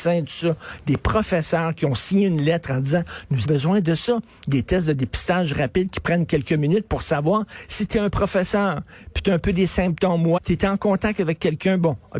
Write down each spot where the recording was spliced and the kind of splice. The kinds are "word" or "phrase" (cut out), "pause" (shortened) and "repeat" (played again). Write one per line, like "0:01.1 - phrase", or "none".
0:03.4 - word
0:10.4 - word